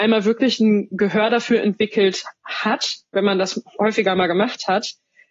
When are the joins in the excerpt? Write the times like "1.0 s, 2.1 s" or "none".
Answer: none